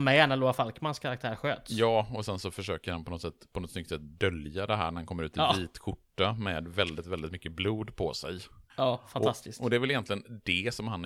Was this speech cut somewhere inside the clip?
yes; 1 cut; at 8.7 s

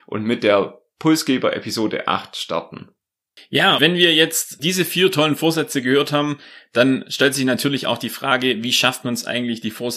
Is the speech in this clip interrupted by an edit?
yes; 1 cut; at 3.8 s

